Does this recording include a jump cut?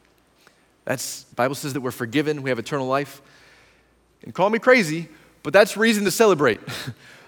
yes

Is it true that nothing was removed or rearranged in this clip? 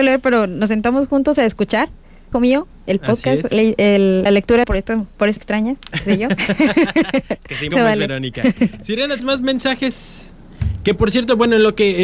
no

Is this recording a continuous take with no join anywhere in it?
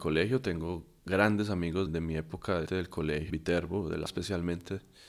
no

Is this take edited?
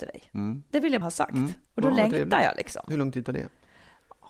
yes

